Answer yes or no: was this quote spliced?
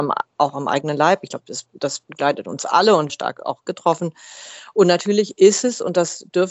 yes